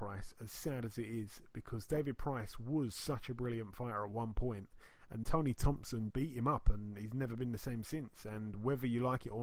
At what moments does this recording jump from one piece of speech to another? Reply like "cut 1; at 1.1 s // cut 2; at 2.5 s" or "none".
cut 1; at 5.2 s // cut 2; at 6.1 s